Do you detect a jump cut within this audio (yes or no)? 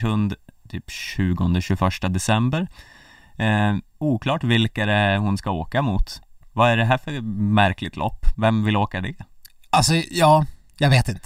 no